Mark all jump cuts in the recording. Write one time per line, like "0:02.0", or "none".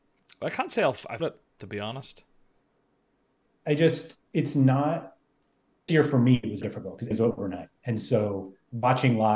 0:01.2
0:01.6
0:02.6
0:04.2
0:05.9
0:06.6
0:07.1